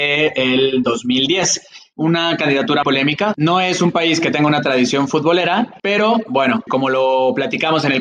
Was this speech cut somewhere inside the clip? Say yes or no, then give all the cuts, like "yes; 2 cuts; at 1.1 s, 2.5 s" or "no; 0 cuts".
yes; 3 cuts; at 2.8 s, 5.8 s, 6.7 s